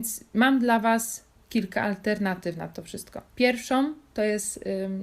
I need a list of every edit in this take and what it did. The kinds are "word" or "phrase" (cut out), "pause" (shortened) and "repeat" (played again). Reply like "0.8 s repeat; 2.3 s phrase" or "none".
1.3 s pause; 3.3 s pause

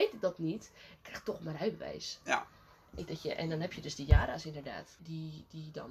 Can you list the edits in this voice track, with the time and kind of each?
3.1 s word; 5.0 s word

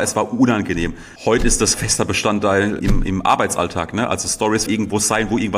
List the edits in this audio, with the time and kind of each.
1.2 s pause; 1.7 s word; 2.8 s word; 4.7 s phrase

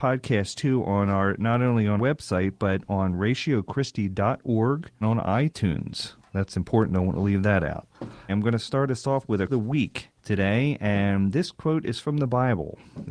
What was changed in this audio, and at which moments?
2.0 s word; 5.0 s word; 8.3 s word; 9.5 s phrase; 10.2 s pause

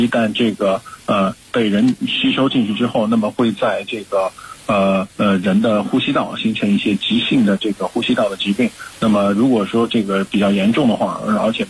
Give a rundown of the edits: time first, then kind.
5.1 s pause

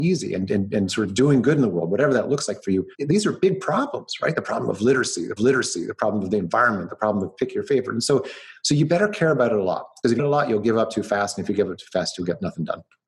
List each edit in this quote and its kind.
2.9 s pause; 5.4 s repeat; 10.2 s phrase

